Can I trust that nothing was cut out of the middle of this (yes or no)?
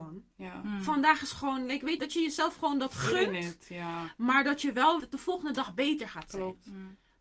no